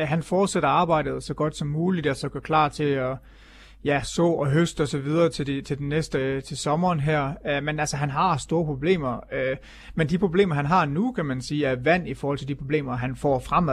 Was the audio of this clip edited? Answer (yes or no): no